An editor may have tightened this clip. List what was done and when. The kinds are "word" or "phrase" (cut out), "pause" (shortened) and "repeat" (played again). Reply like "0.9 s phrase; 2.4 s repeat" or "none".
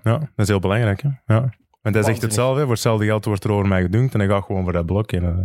none